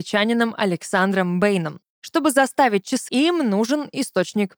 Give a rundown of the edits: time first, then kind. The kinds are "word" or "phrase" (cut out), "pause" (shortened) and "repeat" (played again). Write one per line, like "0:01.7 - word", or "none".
0:03.1 - word